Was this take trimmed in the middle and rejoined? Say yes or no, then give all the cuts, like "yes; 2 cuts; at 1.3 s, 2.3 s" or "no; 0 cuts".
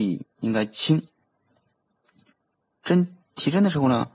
no; 0 cuts